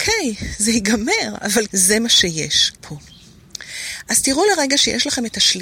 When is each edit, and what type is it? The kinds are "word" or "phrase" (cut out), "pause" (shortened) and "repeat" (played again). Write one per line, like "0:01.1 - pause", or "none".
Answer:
0:01.7 - word
0:02.8 - phrase